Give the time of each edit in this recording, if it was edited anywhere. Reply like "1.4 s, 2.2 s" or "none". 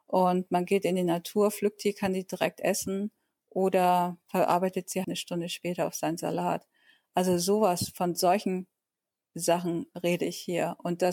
5.0 s

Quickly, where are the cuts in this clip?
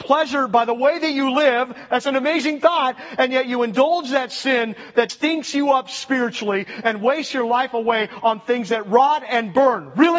5.1 s

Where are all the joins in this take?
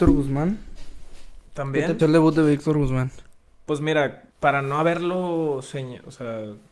2.0 s, 3.5 s, 4.3 s

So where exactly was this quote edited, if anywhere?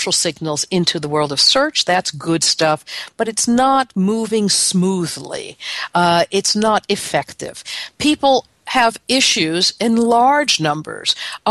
none

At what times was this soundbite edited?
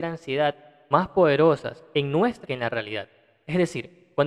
0.9 s, 2.4 s

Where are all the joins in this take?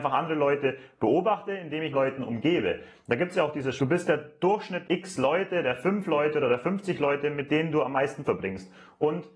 1.9 s, 3.8 s, 4.8 s, 8.2 s

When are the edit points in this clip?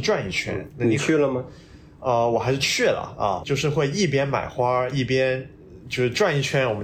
3.4 s

